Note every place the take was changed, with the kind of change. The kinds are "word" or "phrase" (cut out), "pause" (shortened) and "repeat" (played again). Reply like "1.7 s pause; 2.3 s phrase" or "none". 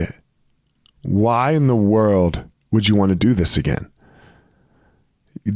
2.5 s pause